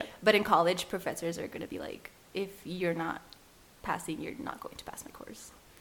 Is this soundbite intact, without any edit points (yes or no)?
yes